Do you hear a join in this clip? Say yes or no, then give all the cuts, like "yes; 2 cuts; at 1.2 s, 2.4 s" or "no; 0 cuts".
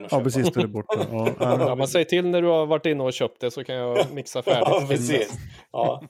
no; 0 cuts